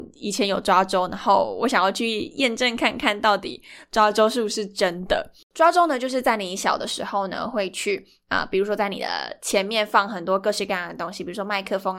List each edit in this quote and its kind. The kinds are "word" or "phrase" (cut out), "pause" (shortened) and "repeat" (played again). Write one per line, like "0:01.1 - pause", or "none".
0:05.4 - pause